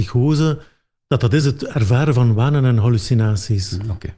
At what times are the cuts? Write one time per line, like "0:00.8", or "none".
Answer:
none